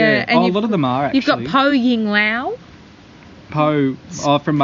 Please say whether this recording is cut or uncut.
uncut